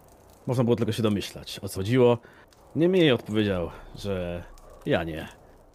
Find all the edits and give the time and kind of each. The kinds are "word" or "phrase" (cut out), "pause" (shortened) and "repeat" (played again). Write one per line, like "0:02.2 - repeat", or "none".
0:01.7 - word